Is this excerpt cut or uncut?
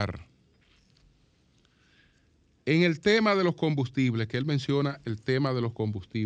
uncut